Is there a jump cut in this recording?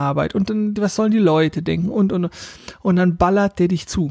no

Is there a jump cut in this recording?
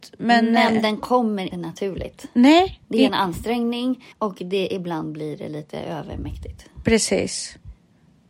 yes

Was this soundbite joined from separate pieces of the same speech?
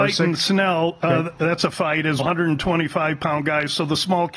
yes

